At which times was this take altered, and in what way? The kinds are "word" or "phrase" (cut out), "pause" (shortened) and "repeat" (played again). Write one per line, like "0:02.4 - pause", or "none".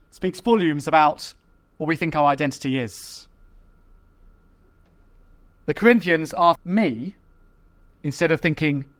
0:06.5 - word